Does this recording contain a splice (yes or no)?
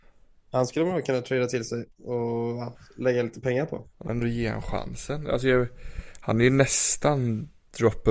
yes